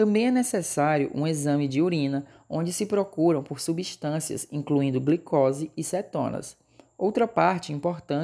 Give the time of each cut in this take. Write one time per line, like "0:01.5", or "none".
none